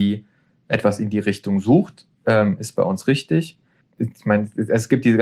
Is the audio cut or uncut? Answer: cut